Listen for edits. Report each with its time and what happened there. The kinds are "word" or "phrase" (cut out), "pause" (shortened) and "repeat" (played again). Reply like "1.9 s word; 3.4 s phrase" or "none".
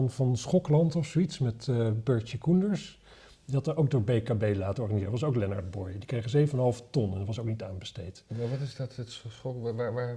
none